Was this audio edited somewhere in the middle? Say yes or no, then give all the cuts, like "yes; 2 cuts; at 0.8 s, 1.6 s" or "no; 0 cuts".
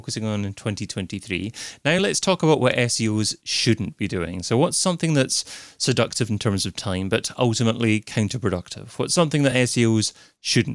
no; 0 cuts